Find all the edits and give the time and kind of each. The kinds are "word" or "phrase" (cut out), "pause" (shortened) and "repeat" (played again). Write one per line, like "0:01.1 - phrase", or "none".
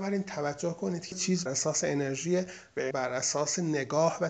0:01.1 - word
0:01.5 - word
0:02.9 - word